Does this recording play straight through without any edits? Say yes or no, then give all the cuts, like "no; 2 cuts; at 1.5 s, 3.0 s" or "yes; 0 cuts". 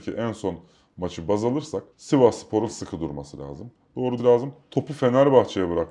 no; 2 cuts; at 1.9 s, 4.2 s